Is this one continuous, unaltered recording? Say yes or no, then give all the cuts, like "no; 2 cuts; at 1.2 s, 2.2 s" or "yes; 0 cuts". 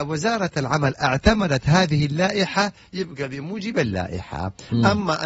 yes; 0 cuts